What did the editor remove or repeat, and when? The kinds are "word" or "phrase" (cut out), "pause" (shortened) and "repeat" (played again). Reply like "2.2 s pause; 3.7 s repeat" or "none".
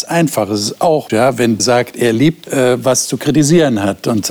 1.1 s phrase; 1.6 s phrase; 2.4 s word